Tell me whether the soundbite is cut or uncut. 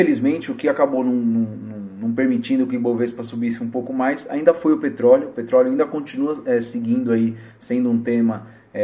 uncut